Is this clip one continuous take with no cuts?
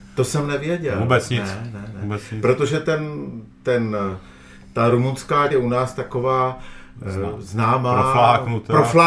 no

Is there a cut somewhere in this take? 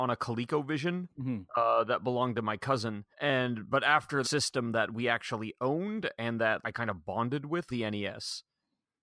yes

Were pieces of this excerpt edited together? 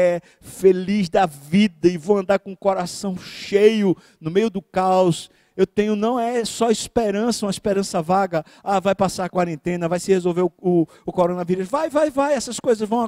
no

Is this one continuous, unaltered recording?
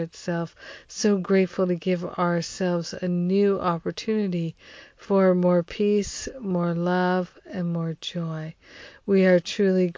yes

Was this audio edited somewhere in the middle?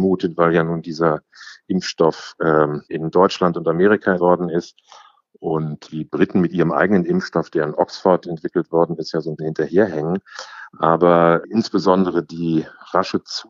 yes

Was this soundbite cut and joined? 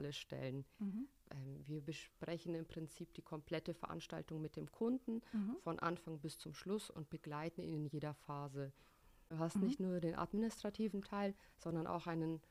no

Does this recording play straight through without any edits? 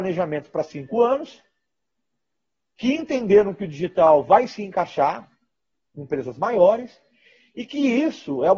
yes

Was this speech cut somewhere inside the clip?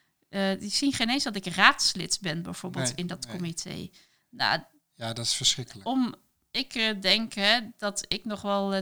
no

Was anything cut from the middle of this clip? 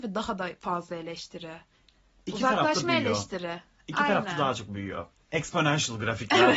no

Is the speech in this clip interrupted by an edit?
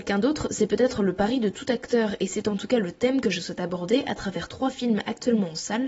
no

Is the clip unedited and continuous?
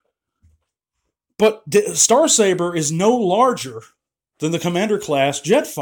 yes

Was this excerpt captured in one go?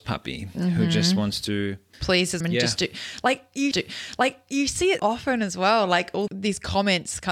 no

